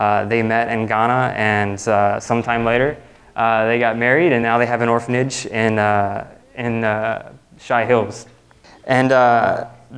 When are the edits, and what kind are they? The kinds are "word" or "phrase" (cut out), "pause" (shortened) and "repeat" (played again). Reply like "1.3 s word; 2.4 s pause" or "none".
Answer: none